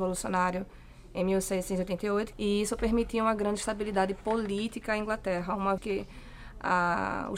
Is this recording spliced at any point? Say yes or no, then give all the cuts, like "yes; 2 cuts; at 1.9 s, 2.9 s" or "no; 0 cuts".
yes; 2 cuts; at 2.3 s, 5.8 s